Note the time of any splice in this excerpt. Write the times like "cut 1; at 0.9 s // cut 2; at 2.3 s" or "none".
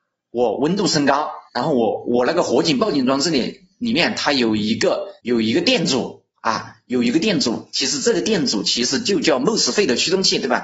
cut 1; at 1.5 s // cut 2; at 5.2 s